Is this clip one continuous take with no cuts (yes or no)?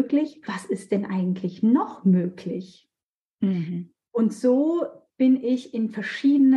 yes